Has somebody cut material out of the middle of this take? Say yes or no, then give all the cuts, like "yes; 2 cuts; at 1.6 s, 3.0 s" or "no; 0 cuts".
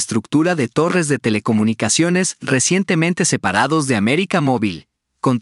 no; 0 cuts